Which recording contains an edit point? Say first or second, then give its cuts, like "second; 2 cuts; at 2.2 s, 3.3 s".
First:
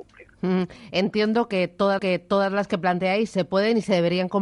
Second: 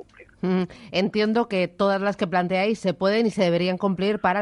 first; 1 cut; at 2.0 s